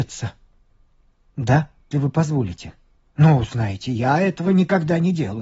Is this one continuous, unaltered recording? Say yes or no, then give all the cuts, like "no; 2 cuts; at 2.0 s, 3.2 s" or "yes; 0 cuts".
no; 2 cuts; at 1.9 s, 3.0 s